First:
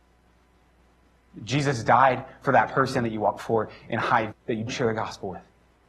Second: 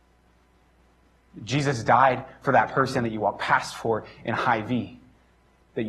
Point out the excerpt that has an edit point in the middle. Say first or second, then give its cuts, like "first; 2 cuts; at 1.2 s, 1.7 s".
first; 3 cuts; at 3.4 s, 4.3 s, 4.7 s